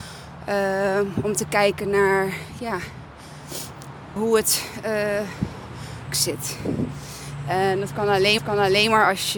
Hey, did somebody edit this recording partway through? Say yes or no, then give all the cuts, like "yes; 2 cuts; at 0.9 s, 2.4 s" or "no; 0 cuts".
yes; 3 cuts; at 4.2 s, 6.1 s, 8.4 s